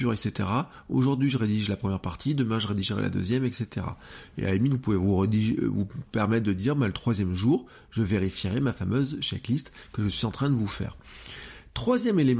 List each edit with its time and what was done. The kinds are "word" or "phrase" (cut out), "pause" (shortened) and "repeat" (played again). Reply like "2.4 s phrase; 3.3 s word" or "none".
none